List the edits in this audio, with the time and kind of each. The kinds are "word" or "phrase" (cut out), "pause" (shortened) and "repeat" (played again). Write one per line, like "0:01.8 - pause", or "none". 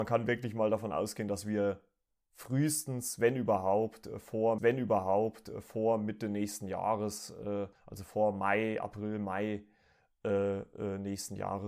0:04.6 - repeat
0:07.8 - pause